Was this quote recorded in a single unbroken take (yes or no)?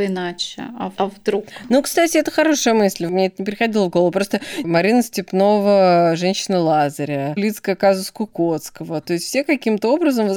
no